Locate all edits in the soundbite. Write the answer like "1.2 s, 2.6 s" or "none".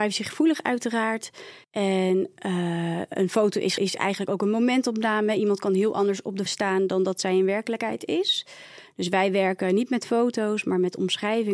1.6 s, 3.8 s, 6.5 s